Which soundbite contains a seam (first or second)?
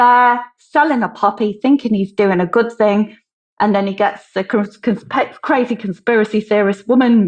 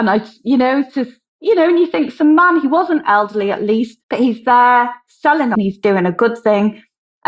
second